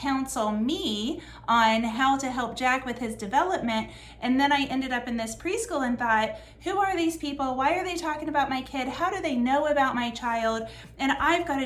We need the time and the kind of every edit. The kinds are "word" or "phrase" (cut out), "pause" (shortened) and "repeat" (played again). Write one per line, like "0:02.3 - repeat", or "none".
none